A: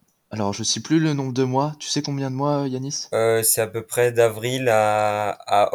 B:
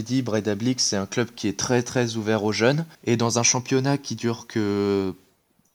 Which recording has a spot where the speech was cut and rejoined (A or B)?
B